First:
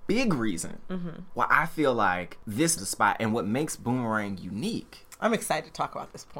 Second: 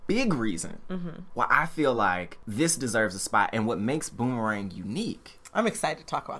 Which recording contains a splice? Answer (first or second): first